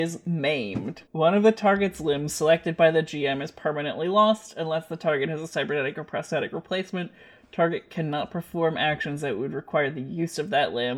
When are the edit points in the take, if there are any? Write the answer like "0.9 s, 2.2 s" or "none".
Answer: 1.1 s